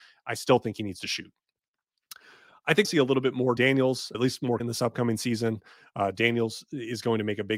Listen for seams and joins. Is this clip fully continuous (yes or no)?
no